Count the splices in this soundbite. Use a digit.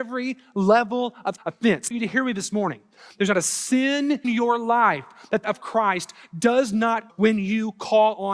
5